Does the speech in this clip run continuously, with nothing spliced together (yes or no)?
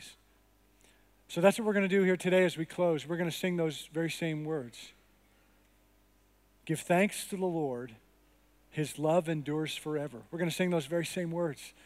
yes